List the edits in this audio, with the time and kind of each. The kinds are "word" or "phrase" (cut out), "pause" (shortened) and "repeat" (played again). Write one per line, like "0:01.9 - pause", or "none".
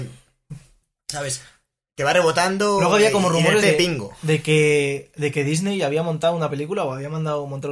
0:03.6 - word